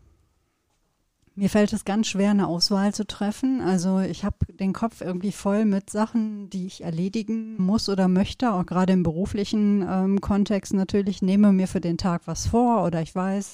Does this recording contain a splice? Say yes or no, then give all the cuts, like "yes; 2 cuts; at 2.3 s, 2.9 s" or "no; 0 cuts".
yes; 1 cut; at 7.6 s